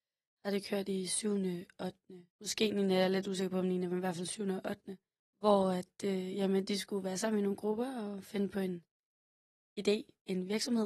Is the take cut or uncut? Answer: cut